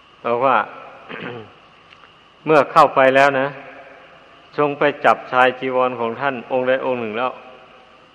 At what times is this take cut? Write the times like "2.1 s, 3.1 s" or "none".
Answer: none